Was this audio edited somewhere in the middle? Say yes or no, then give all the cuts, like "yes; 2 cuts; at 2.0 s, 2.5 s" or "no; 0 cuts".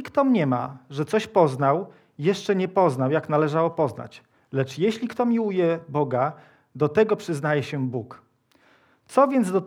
no; 0 cuts